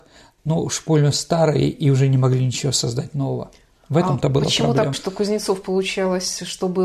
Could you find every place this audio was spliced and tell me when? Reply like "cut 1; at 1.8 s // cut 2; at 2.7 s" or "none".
cut 1; at 4.9 s

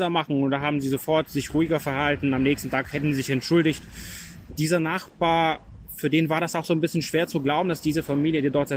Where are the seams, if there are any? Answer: none

